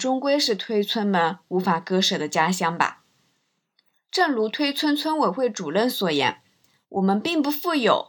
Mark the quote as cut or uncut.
uncut